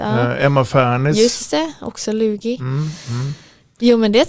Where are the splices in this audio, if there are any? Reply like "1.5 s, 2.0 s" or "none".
none